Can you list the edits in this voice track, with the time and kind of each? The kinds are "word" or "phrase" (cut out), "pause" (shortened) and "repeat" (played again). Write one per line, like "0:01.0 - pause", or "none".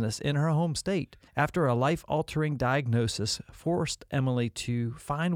0:01.3 - pause